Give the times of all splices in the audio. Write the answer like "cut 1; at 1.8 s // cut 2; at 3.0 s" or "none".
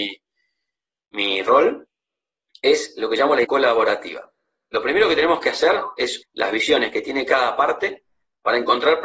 cut 1; at 3.4 s // cut 2; at 6.2 s

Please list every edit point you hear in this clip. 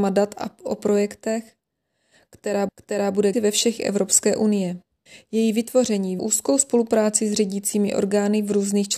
cut 1; at 2.7 s // cut 2; at 3.3 s // cut 3; at 3.8 s // cut 4; at 5.1 s // cut 5; at 6.2 s

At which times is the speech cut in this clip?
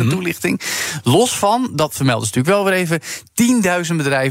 none

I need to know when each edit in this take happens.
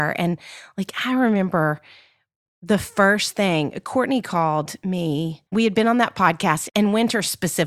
cut 1; at 5.5 s

